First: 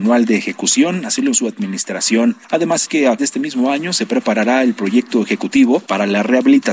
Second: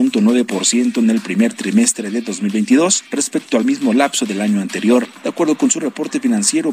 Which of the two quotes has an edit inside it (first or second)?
first